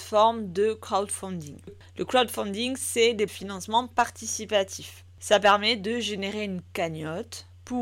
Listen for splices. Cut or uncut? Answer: cut